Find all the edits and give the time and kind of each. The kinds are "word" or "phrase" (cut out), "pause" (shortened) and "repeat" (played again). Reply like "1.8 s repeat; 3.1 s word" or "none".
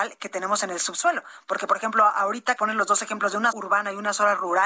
2.6 s word; 3.5 s word

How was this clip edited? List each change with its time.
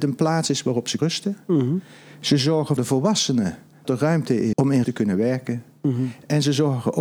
1.0 s word; 2.8 s word; 3.8 s word; 4.5 s word; 4.8 s word

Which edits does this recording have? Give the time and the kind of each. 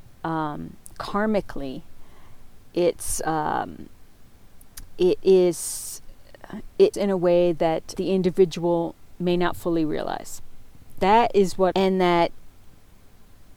6.9 s word; 8.0 s word; 11.7 s phrase

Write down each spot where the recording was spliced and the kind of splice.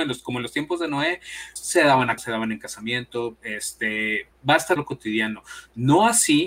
1.6 s word; 2.2 s word; 4.3 s word; 4.8 s word

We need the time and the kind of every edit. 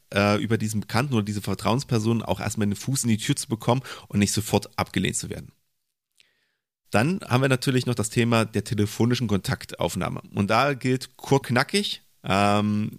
2.4 s word; 11.4 s word

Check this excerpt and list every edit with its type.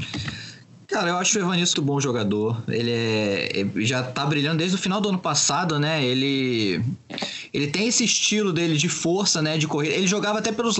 1.7 s word

